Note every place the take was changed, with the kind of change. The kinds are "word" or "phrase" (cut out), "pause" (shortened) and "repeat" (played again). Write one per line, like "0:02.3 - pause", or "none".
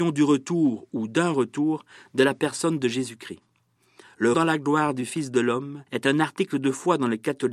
0:04.3 - word
0:05.9 - pause